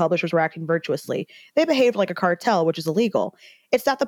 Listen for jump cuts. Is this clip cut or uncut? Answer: uncut